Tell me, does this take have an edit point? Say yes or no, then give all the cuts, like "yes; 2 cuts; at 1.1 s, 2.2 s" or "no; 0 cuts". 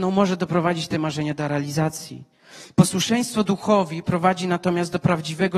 no; 0 cuts